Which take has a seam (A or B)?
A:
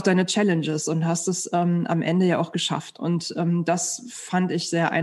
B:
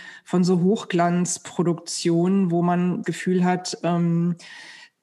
B